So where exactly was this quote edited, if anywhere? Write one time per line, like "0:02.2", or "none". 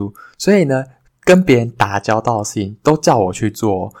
none

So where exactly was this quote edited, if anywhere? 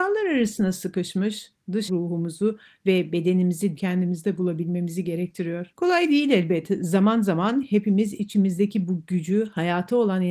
0:01.9
0:03.8
0:05.7

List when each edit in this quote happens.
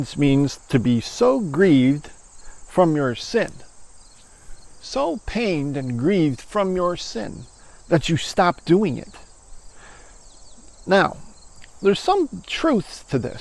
none

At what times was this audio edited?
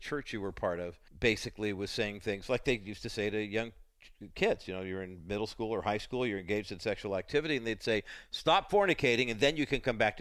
0:01.1

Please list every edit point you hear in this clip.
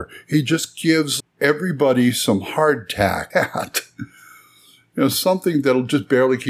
0:01.2
0:03.3

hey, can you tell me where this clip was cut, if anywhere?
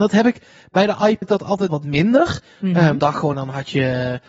0:01.2
0:01.7
0:03.0
0:03.3

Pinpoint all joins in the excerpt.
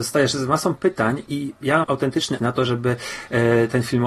0:01.3
0:01.8
0:02.4

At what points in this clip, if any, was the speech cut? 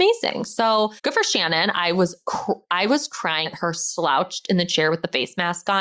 0:01.0
0:03.5

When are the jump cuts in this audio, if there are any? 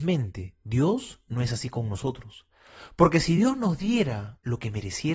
none

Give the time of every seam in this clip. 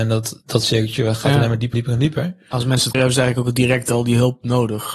0:01.7
0:02.9

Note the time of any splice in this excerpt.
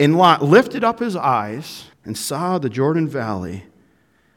0:01.9

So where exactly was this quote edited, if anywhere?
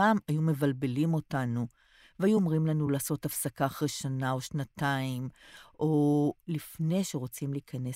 none

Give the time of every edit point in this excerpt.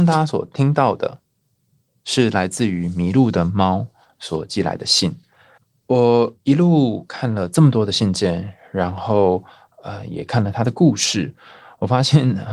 0:05.6

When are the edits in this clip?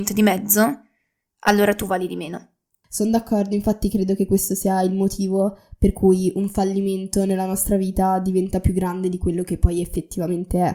none

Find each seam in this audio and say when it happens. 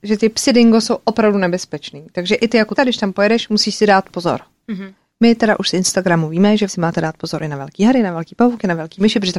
0:02.8
0:06.7

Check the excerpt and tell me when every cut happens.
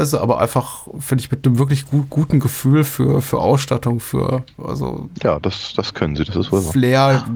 none

